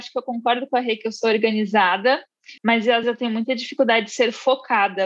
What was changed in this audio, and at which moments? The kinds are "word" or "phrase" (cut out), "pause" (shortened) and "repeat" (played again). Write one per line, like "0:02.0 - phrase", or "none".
0:02.6 - pause
0:03.0 - word

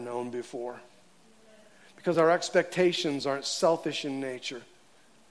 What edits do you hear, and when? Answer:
none

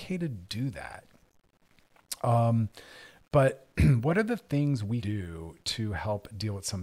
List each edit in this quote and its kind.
0:05.0 - word

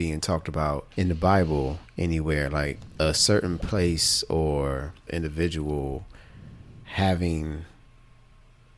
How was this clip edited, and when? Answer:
0:00.9 - pause
0:05.1 - phrase

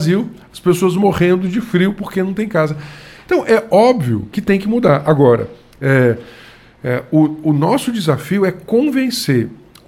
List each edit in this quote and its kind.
none

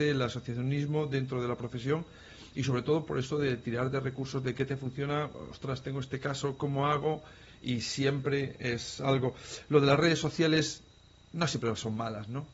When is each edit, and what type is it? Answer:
none

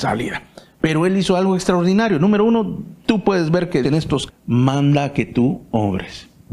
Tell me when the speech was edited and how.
0:03.8 - word
0:04.3 - word

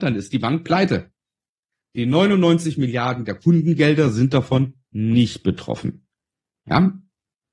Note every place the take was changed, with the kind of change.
none

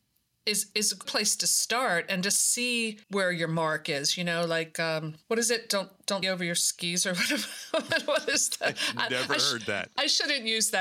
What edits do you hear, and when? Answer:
0:01.0 - phrase
0:03.0 - pause
0:05.2 - pause
0:06.2 - word

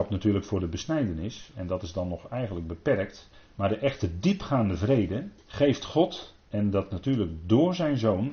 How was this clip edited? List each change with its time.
0:03.3 - pause
0:05.4 - pause

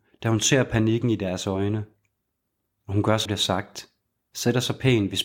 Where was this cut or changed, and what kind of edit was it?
0:03.3 - word

